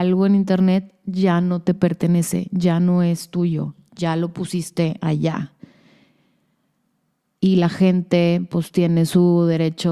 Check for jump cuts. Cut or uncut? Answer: uncut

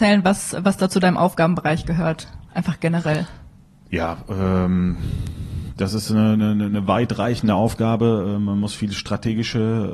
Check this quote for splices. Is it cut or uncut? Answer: uncut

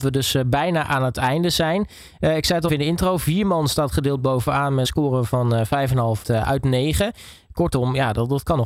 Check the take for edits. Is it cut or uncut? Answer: cut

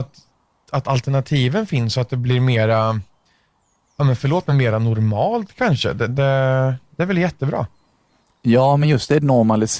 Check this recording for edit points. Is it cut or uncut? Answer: uncut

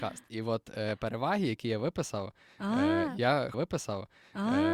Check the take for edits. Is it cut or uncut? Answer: cut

